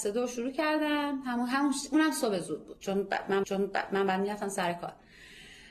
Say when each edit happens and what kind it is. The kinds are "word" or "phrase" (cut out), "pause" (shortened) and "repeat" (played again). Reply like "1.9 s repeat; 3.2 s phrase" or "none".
3.4 s repeat